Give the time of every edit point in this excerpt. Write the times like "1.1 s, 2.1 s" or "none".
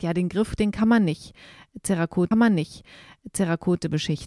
2.3 s

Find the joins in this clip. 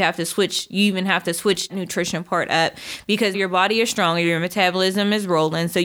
1.7 s, 3.3 s

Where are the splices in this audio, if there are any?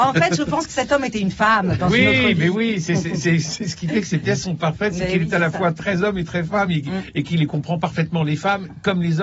none

